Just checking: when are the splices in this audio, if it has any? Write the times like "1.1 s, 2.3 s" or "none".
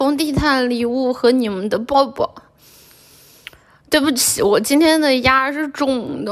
none